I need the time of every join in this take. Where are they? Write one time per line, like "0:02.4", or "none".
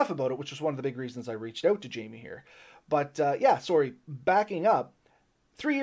none